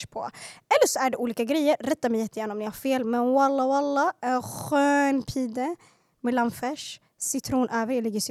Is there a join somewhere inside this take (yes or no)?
no